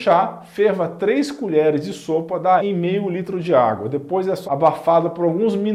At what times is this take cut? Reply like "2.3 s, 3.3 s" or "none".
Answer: 2.6 s, 4.5 s